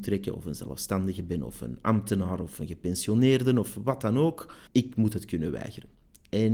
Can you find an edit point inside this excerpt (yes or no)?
yes